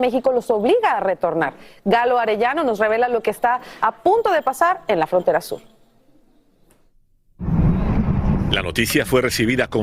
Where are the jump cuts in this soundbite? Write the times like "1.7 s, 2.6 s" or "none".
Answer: none